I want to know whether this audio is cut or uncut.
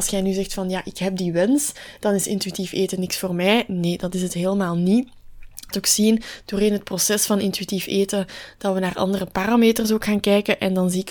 cut